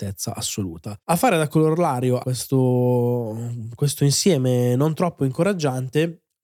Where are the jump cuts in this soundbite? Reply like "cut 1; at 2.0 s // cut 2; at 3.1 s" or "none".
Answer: cut 1; at 1.0 s // cut 2; at 2.2 s

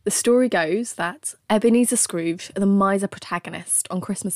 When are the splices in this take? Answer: cut 1; at 1.4 s

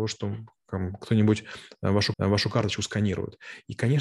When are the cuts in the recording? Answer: cut 1; at 2.1 s

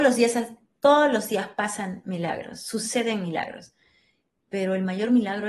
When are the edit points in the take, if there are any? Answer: none

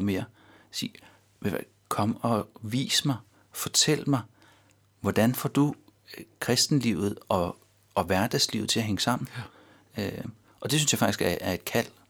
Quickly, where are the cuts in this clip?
none

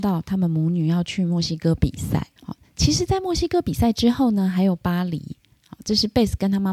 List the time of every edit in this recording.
cut 1; at 2.4 s

